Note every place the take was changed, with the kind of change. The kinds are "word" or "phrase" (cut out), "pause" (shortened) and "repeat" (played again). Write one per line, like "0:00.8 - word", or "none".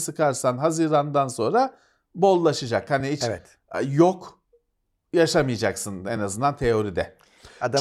none